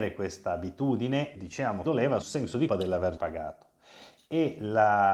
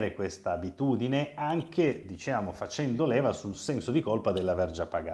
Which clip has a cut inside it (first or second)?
first